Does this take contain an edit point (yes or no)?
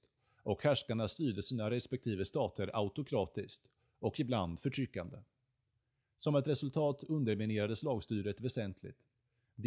no